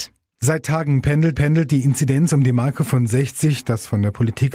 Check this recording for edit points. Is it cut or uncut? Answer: cut